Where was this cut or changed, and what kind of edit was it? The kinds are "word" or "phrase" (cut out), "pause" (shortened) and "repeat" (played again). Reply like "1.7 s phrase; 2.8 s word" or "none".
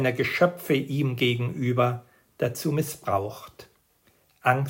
none